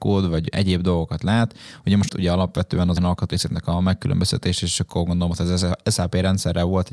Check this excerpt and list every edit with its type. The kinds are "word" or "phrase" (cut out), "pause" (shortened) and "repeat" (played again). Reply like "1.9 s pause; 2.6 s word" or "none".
2.1 s phrase; 3.0 s phrase

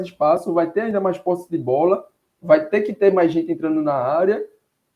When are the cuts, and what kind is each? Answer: none

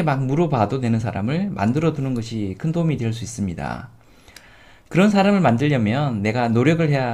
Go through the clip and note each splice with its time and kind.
none

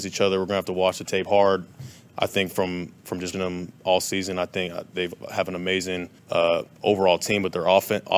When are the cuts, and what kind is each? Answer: 3.0 s pause; 3.3 s word; 6.2 s pause

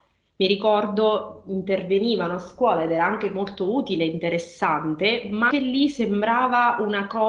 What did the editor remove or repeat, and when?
5.5 s word

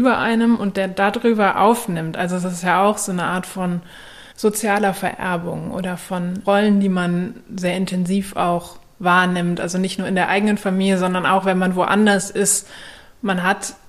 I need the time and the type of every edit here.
4.3 s pause; 6.4 s word

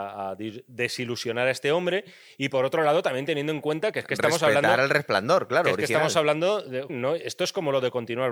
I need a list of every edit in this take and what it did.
6.9 s word

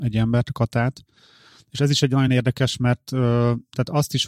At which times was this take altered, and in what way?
none

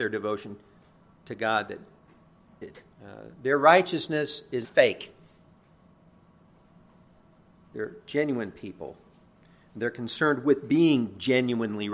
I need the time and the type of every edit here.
2.6 s word; 2.9 s pause; 4.6 s word

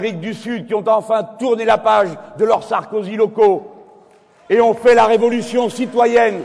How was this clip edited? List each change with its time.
none

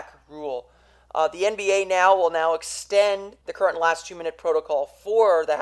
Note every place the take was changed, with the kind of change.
3.4 s pause

